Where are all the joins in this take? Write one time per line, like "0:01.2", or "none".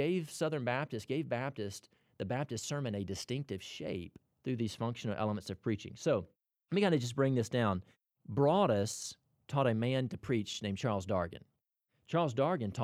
none